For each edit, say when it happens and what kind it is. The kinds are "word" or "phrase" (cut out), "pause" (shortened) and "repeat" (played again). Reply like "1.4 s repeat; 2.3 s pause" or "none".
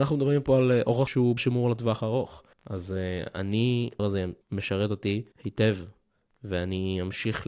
1.1 s word; 1.4 s word; 2.5 s pause; 4.0 s phrase; 4.4 s pause; 5.3 s pause